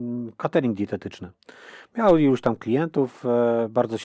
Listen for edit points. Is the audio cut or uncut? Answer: uncut